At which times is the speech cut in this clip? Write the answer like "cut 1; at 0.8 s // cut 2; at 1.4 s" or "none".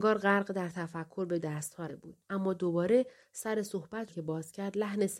cut 1; at 1.4 s // cut 2; at 1.9 s // cut 3; at 2.2 s // cut 4; at 4.1 s